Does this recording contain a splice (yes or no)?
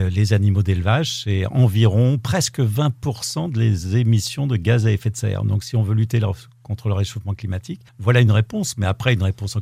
yes